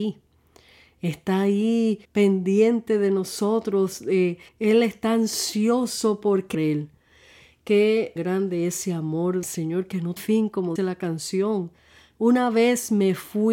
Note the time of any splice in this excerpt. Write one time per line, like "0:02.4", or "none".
0:02.0
0:04.5
0:06.5
0:08.2
0:09.4
0:10.2
0:10.8

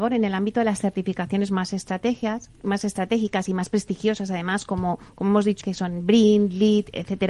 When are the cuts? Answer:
0:05.6

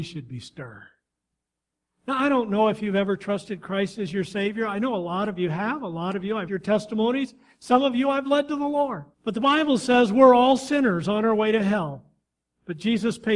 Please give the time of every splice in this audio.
0:06.5
0:09.1

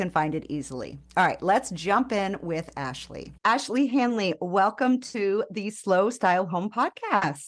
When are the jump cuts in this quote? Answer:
0:03.4

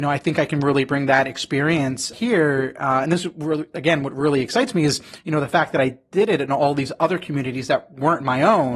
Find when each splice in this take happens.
0:02.1

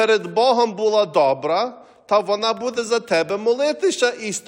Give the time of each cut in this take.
none

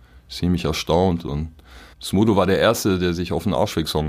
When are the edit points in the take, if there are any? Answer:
0:01.9

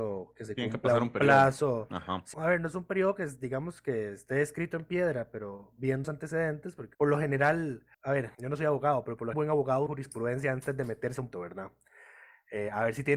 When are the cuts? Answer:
0:02.3
0:06.0
0:06.9
0:07.9
0:08.3
0:09.3
0:09.9
0:11.3

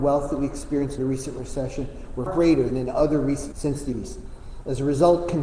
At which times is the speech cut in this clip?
0:01.0
0:02.3
0:02.7
0:03.5
0:03.9

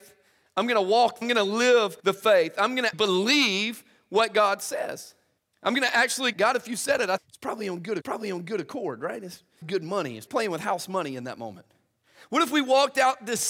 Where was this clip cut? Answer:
0:01.2
0:02.0
0:02.9
0:05.4
0:06.3
0:07.2
0:08.0
0:09.6
0:10.3

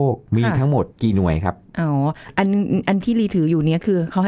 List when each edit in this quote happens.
0:00.9

